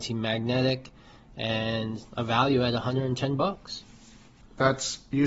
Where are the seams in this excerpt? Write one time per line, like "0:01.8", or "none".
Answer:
0:02.1